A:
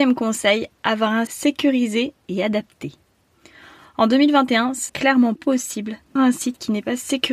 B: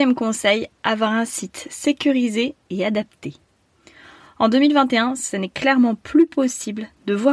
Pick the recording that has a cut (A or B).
A